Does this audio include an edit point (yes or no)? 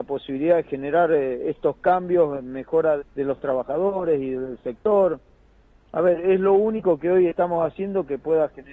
yes